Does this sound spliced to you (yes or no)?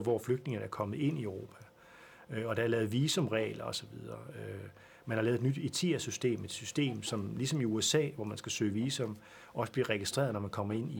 no